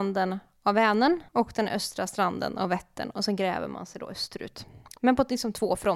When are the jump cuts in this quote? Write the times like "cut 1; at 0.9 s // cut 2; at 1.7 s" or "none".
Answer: cut 1; at 1.3 s